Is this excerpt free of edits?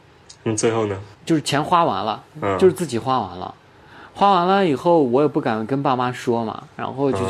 no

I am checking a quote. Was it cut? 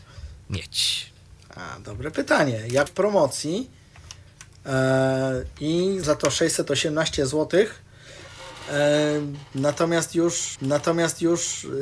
yes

